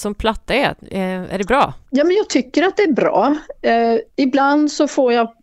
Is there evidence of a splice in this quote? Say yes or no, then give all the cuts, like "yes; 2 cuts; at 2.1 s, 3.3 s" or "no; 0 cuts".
yes; 1 cut; at 1.9 s